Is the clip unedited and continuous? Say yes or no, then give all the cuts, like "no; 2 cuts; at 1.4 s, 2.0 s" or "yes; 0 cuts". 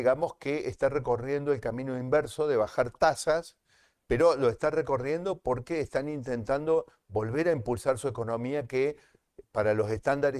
yes; 0 cuts